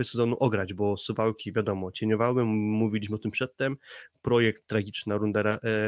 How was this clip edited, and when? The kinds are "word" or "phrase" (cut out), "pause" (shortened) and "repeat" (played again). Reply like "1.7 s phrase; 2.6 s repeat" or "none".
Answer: none